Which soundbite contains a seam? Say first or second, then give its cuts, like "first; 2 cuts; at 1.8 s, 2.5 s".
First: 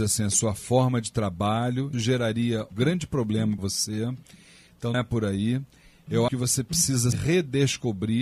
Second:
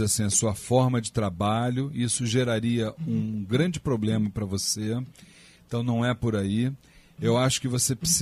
first; 6 cuts; at 1.9 s, 2.7 s, 3.6 s, 4.9 s, 6.3 s, 7.1 s